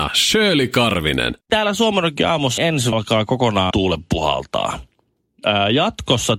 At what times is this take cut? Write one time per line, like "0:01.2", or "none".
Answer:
0:01.4
0:02.6
0:02.9
0:03.7

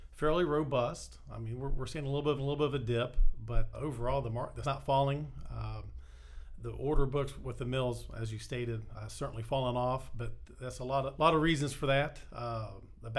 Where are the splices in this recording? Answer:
0:02.4
0:03.7
0:04.6
0:06.6
0:08.9
0:11.2

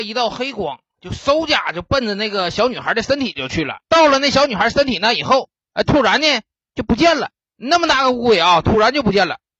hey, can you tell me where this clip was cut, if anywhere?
0:03.8

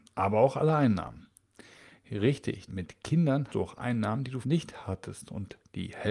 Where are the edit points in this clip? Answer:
0:02.7
0:03.5
0:04.4

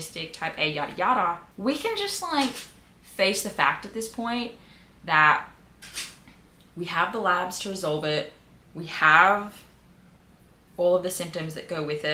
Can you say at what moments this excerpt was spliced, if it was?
0:01.5

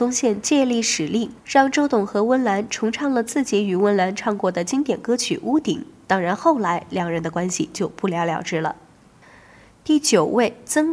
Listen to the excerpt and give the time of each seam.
none

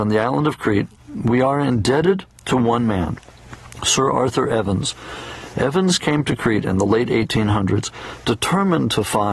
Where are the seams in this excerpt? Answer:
none

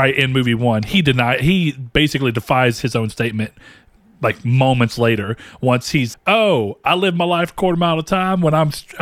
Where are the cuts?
0:06.1

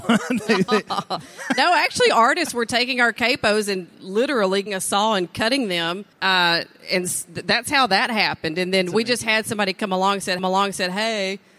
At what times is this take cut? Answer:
0:04.7
0:06.1
0:10.4

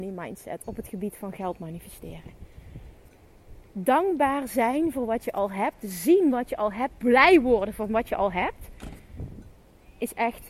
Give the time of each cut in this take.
none

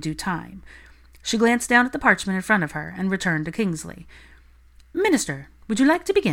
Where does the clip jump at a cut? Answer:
none

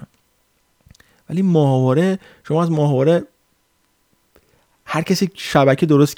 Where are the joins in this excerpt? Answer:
none

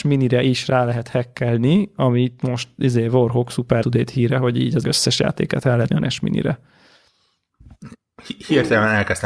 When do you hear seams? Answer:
0:03.8
0:04.8
0:05.9

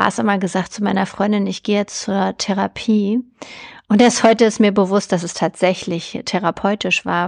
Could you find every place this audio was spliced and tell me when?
none

